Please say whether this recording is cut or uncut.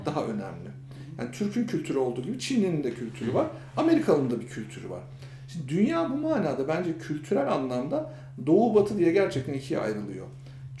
uncut